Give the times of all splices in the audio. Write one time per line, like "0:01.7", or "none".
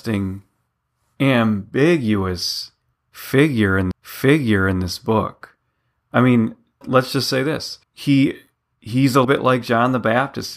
0:03.9
0:06.8
0:07.8
0:09.2